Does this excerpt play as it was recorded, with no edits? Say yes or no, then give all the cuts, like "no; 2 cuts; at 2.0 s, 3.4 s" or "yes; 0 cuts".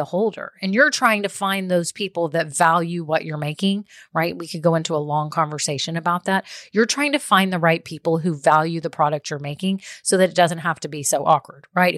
yes; 0 cuts